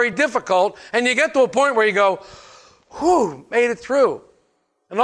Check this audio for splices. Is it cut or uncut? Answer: uncut